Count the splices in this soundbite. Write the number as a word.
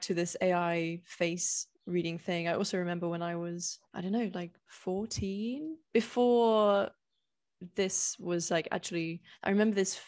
three